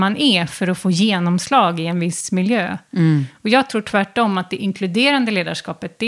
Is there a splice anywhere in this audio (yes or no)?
no